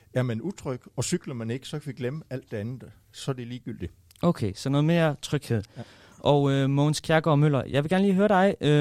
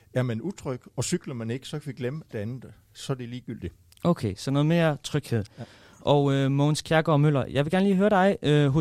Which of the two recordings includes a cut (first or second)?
second